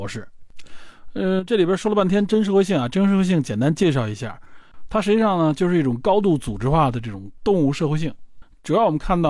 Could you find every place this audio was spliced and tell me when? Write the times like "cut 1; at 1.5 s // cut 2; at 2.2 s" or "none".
none